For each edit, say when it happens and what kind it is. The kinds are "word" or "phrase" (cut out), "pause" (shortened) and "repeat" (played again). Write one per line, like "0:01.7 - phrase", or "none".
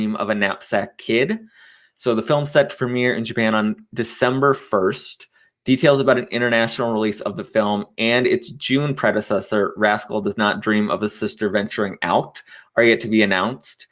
none